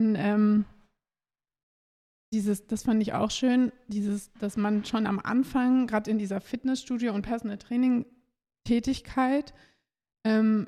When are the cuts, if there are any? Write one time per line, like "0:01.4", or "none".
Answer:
none

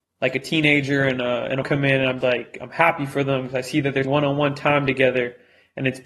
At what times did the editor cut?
0:01.6
0:02.2
0:04.0

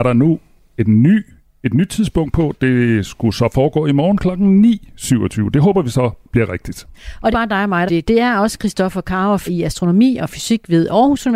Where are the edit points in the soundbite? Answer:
0:07.3
0:07.9
0:09.5

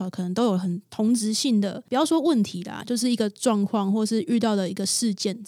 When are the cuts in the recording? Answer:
0:01.9

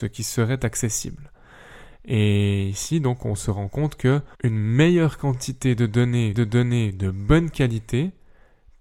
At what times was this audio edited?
0:04.3
0:06.3

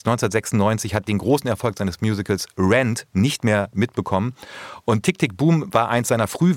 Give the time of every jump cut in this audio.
none

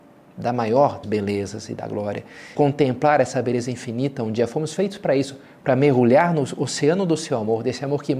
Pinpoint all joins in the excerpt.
0:01.0
0:02.5

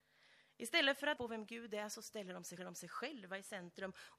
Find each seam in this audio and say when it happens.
0:01.2
0:02.6

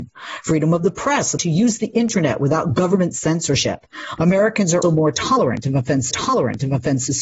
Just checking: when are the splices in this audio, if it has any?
0:01.4
0:04.8
0:06.1

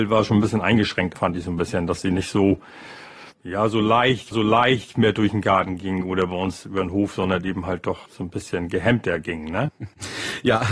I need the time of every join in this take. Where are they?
0:01.1
0:03.3
0:04.3
0:08.1

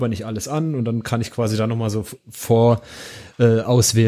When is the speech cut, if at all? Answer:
none

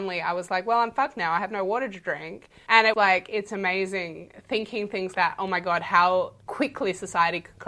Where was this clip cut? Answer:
0:02.9
0:05.1
0:06.4

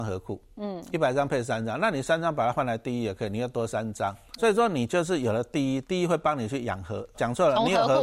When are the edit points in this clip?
0:04.4
0:07.1

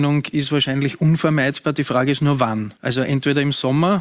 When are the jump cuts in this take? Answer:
0:02.8

